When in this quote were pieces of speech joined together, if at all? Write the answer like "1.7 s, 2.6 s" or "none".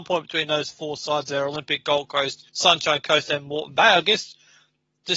2.5 s